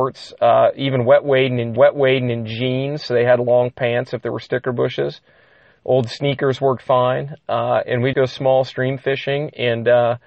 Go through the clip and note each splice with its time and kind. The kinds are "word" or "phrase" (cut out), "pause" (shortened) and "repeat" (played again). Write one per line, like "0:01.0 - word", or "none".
0:01.8 - repeat
0:08.1 - word